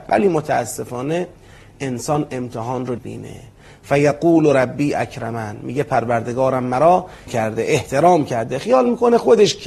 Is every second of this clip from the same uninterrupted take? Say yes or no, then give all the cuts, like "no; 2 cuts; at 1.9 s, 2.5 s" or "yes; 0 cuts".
no; 2 cuts; at 3.0 s, 7.3 s